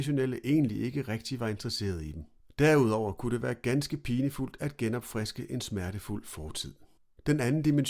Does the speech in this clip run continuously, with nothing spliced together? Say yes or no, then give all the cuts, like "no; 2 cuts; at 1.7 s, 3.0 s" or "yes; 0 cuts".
yes; 0 cuts